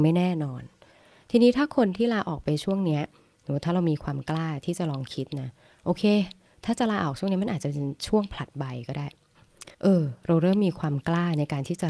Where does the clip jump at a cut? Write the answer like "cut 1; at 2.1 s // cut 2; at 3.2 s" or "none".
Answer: cut 1; at 9.7 s